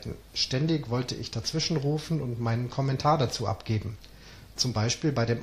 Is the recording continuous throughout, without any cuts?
yes; 0 cuts

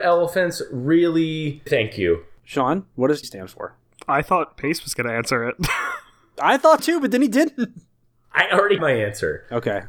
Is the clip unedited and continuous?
no; 4 cuts; at 1.7 s, 3.2 s, 6.8 s, 8.8 s

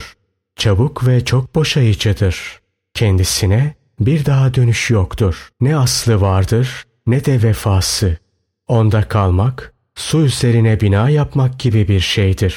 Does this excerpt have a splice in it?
yes; 1 cut; at 5.5 s

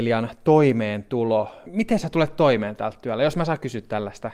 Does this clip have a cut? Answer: no; 0 cuts

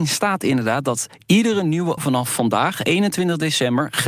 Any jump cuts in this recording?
yes; 1 cut; at 2.0 s

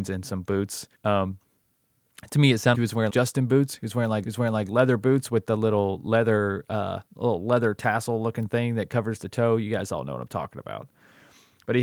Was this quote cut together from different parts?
yes; 5 cuts; at 0.9 s, 2.7 s, 3.1 s, 4.2 s, 7.1 s

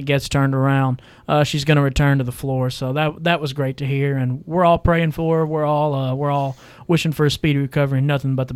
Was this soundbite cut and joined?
no; 0 cuts

